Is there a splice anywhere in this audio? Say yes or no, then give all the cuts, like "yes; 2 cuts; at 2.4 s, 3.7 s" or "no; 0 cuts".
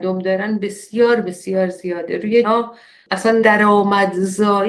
yes; 2 cuts; at 2.4 s, 3.4 s